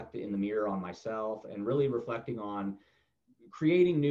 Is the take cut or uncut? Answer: uncut